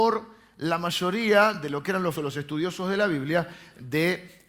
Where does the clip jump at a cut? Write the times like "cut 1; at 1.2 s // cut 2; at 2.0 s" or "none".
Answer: cut 1; at 2.1 s

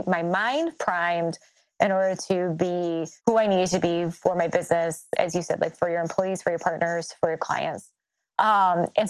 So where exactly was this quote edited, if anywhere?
cut 1; at 3.2 s

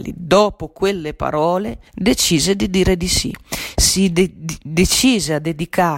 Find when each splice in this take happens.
cut 1; at 1.9 s

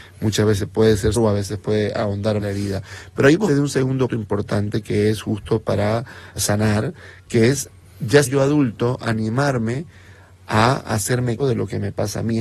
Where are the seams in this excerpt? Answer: cut 1; at 1.2 s // cut 2; at 2.4 s // cut 3; at 3.5 s // cut 4; at 4.1 s // cut 5; at 6.4 s // cut 6; at 8.3 s // cut 7; at 11.4 s

